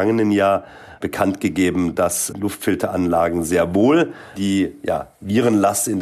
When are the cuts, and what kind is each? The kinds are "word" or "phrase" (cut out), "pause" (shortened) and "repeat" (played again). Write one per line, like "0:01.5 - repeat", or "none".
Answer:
0:02.3 - word
0:04.4 - word